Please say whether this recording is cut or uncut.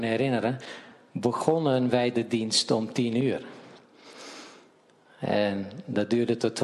uncut